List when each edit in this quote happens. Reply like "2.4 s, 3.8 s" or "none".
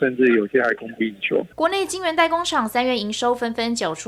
1.5 s